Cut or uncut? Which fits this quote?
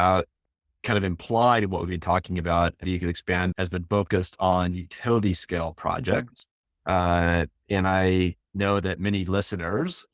cut